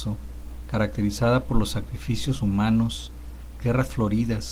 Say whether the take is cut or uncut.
cut